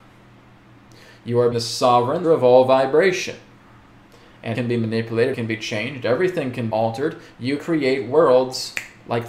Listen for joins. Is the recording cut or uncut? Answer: cut